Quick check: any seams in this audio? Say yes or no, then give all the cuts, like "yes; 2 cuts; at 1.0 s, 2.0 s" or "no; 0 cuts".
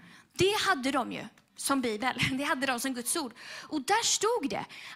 no; 0 cuts